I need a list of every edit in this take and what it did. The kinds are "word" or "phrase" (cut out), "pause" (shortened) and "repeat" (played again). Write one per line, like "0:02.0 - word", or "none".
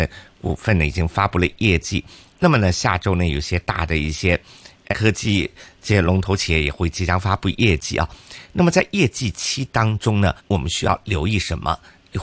0:04.9 - word
0:10.4 - pause

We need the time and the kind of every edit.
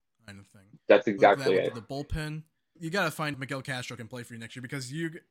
0:02.8 - word
0:03.3 - word

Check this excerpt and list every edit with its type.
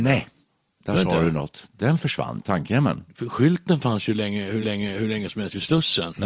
0:02.4 - word
0:04.6 - repeat

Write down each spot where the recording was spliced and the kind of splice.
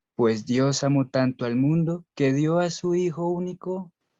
0:02.1 - pause

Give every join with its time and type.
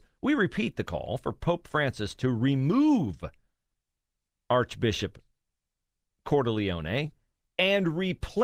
none

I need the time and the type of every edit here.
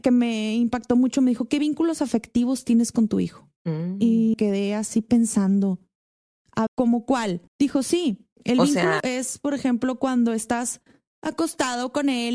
0:03.6 - pause
0:04.3 - word
0:06.7 - phrase
0:07.5 - pause
0:08.3 - pause
0:09.0 - word

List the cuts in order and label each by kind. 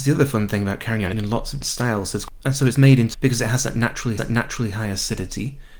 0:01.1 - phrase
0:01.6 - word
0:03.1 - word
0:04.2 - repeat

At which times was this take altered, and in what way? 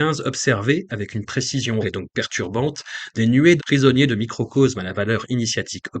0:01.8 - word
0:03.6 - word

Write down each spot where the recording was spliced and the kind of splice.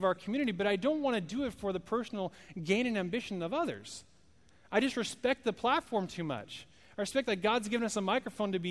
none

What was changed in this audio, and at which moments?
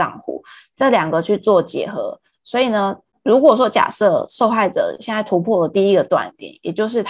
0:03.1 - pause

